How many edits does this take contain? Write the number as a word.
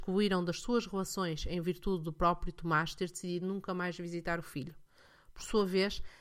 zero